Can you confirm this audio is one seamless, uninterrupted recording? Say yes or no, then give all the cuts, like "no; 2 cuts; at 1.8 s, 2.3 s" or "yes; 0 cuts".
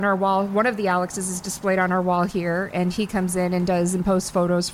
yes; 0 cuts